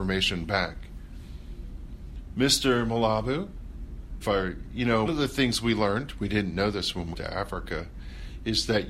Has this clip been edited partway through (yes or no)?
yes